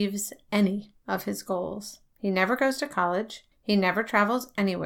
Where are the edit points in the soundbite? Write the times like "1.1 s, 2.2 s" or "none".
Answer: 2.1 s, 3.5 s